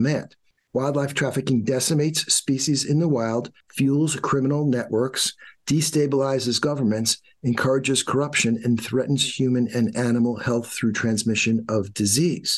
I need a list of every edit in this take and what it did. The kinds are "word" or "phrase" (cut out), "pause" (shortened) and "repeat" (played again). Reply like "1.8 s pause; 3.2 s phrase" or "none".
none